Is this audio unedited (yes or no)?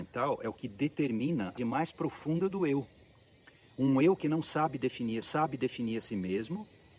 no